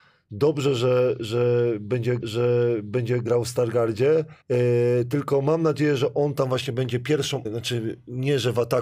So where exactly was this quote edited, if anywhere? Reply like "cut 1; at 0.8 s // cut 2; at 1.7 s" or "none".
cut 1; at 2.2 s // cut 2; at 4.4 s // cut 3; at 7.4 s

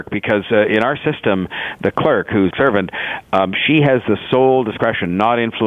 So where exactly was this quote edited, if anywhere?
cut 1; at 2.5 s

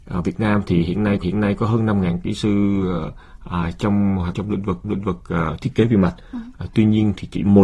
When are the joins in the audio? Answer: cut 1; at 1.2 s // cut 2; at 4.3 s // cut 3; at 4.8 s

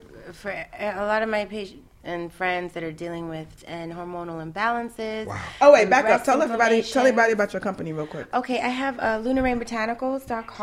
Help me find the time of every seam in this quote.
cut 1; at 2.0 s // cut 2; at 3.6 s

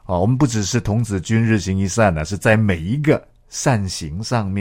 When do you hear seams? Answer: cut 1; at 3.4 s

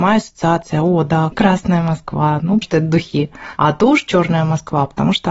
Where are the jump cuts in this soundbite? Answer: cut 1; at 1.3 s // cut 2; at 2.6 s

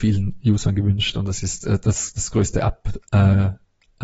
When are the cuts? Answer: none

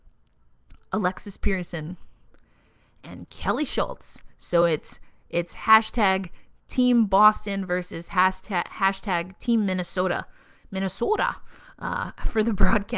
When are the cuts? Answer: none

